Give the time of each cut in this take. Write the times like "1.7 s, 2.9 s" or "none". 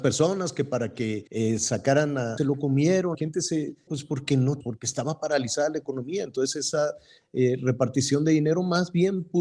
1.3 s, 2.4 s, 3.1 s, 3.9 s, 4.6 s